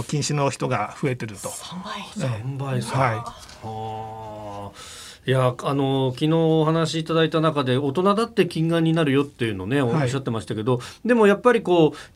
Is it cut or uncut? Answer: uncut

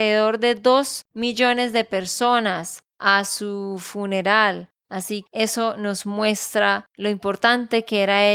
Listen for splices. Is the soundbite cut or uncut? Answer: cut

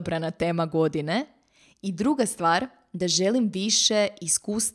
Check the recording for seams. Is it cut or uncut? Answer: uncut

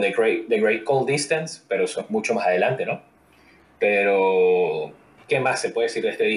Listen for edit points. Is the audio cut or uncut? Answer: uncut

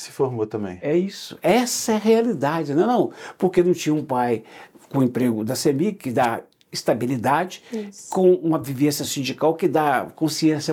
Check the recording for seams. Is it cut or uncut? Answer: uncut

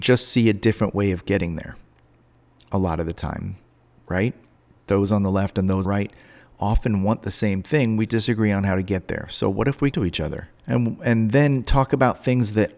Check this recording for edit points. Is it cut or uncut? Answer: cut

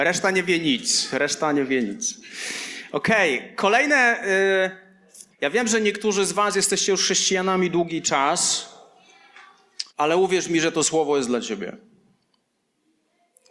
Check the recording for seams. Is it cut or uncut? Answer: cut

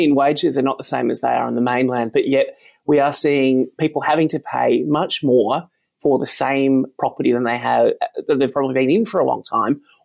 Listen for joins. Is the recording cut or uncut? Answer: uncut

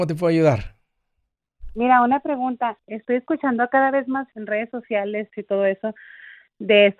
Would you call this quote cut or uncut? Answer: cut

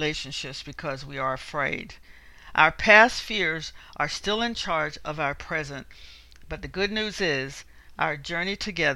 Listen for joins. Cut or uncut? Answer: uncut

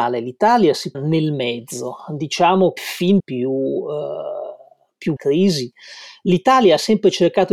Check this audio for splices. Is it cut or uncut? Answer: cut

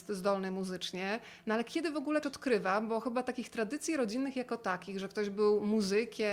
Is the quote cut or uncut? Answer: cut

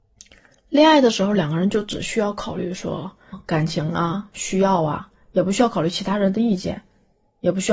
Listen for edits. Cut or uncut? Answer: cut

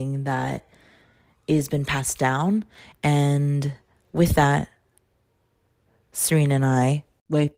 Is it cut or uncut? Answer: uncut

